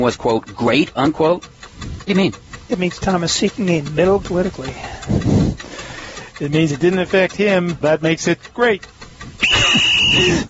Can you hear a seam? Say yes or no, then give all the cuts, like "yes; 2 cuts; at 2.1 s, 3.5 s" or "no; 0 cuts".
yes; 3 cuts; at 2.1 s, 4.2 s, 7.8 s